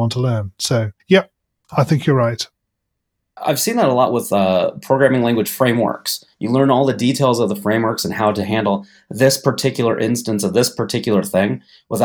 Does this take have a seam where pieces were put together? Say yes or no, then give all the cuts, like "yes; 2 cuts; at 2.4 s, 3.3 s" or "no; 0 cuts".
yes; 2 cuts; at 1.0 s, 6.3 s